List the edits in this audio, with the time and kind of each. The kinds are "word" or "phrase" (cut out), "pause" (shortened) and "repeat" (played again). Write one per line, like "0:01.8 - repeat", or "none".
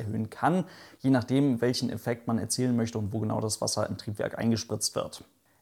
none

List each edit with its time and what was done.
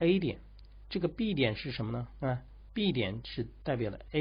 none

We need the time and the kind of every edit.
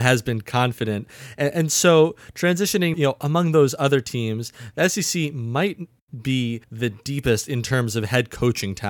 0:02.9 - word
0:06.6 - pause

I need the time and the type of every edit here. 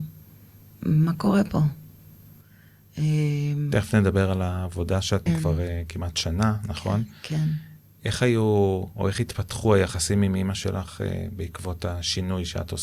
0:05.3 - phrase

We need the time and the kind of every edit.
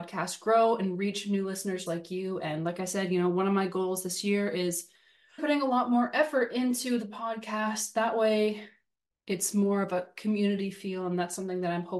0:01.9 - word
0:05.4 - word

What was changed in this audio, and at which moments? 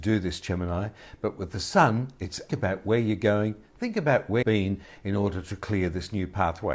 0:02.5 - phrase
0:04.4 - word

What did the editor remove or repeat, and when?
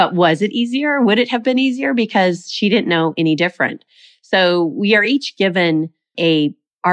none

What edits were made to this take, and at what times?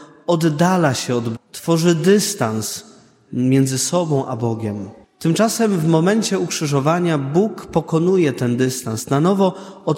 0:01.3 - word
0:03.3 - word
0:05.0 - pause

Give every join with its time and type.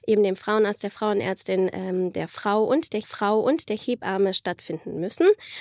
0:03.0 - repeat

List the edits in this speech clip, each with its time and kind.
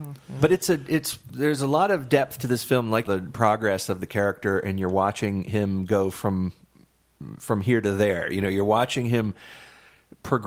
0:03.0 - phrase

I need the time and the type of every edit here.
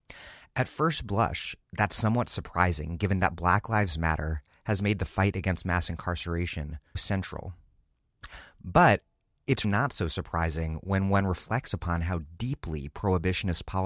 0:01.6 - pause
0:07.0 - word
0:09.6 - word

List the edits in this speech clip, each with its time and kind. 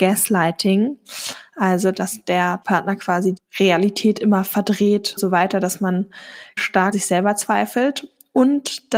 0:02.6 - word
0:03.4 - word
0:05.2 - word
0:06.6 - word
0:06.9 - word

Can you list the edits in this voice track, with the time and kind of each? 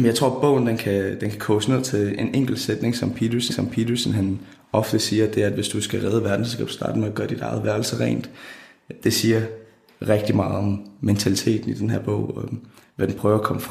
0:03.5 - repeat

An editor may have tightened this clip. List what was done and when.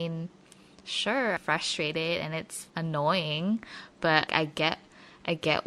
0:01.4 - word
0:02.7 - pause
0:04.3 - word

